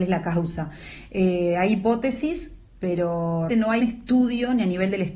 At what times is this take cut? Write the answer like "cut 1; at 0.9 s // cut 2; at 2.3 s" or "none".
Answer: cut 1; at 3.5 s // cut 2; at 3.8 s